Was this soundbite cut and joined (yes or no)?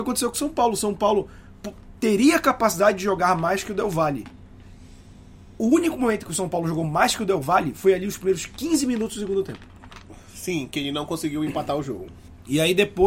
no